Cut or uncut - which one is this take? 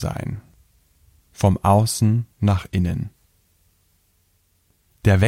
cut